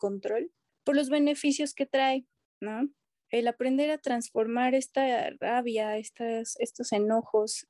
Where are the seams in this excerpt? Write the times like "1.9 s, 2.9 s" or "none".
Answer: none

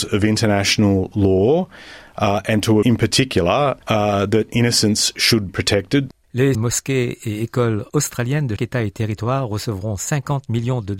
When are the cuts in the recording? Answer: 2.8 s, 3.8 s, 5.5 s, 6.5 s, 7.9 s, 8.6 s

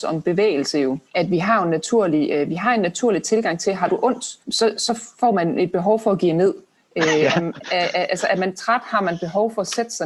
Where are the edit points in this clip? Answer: 1.1 s, 4.4 s, 5.1 s, 6.7 s

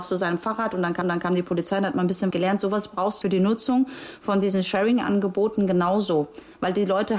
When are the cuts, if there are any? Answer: 1.0 s, 2.3 s, 3.2 s

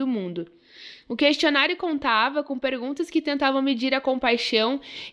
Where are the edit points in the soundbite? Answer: none

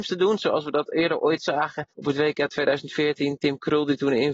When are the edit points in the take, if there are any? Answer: 1.9 s

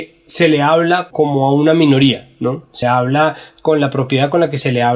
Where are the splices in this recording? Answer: 1.1 s, 2.8 s

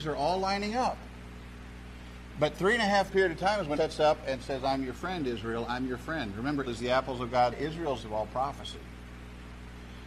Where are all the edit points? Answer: 2.5 s, 3.1 s, 3.8 s, 6.7 s, 7.5 s, 8.0 s

